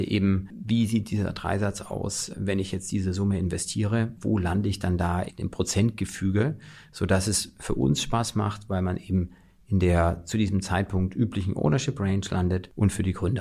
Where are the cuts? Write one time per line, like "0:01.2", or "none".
none